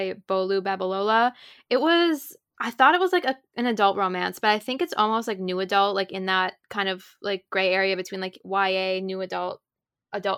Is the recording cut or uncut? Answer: uncut